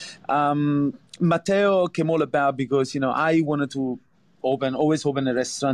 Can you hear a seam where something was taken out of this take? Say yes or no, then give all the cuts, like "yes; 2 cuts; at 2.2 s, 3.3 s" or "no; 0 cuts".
no; 0 cuts